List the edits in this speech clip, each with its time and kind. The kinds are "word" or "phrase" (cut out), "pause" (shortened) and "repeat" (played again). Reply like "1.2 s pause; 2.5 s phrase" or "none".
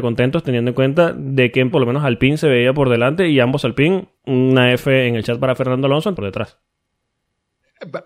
1.7 s word; 4.2 s pause; 6.2 s word